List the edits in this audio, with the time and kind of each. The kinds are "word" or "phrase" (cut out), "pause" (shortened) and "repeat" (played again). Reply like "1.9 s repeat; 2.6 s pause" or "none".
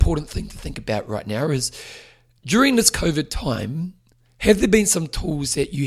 none

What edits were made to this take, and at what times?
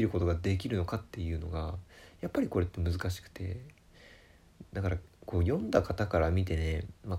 none

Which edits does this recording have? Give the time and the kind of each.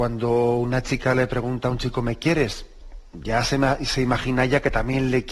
none

